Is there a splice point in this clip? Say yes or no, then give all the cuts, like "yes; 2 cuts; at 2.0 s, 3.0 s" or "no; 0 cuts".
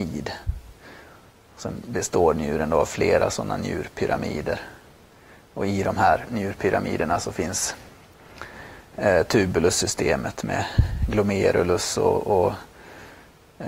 no; 0 cuts